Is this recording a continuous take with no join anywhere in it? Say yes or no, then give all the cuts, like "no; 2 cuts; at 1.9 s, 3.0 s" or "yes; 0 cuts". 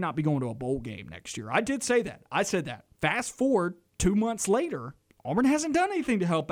no; 3 cuts; at 2.9 s, 3.9 s, 5.0 s